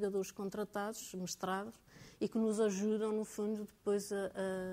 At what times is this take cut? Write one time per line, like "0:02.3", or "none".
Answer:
none